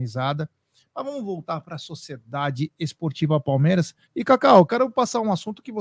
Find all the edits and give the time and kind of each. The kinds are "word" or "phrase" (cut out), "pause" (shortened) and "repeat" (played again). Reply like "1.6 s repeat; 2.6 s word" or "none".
4.0 s pause